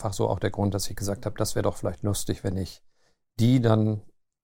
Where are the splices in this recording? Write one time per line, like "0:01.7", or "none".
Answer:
none